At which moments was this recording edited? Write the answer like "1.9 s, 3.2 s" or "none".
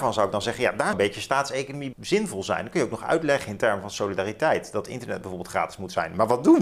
0.9 s, 1.9 s